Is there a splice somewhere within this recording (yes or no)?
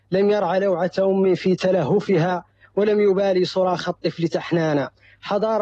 no